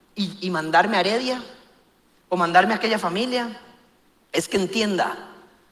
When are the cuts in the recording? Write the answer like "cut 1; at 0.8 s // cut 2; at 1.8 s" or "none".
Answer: none